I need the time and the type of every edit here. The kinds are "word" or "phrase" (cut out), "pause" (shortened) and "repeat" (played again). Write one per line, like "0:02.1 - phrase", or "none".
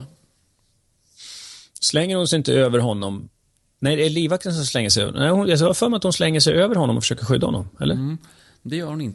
none